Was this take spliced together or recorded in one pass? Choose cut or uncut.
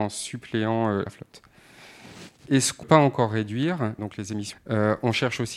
cut